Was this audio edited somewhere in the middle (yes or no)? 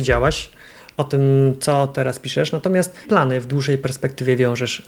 yes